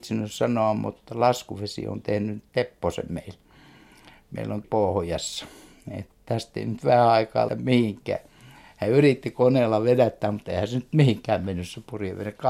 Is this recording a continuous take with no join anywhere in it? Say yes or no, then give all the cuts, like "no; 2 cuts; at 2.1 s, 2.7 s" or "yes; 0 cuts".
no; 2 cuts; at 4.6 s, 7.5 s